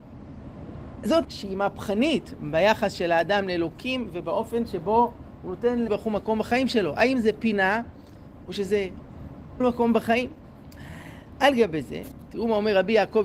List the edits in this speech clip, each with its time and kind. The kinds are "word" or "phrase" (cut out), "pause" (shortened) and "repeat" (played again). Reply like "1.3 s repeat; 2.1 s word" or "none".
1.2 s word; 5.9 s word; 9.6 s word